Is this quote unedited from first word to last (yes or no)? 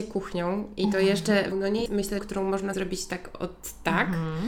no